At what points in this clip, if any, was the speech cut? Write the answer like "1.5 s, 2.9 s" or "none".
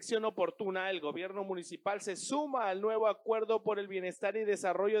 none